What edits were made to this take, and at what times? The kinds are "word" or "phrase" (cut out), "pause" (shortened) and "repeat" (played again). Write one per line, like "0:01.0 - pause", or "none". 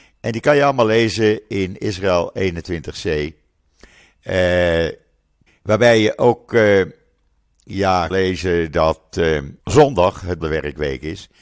0:05.5 - pause
0:08.1 - word
0:09.6 - pause
0:10.4 - phrase